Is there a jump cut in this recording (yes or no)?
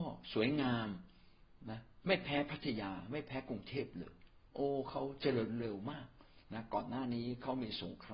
yes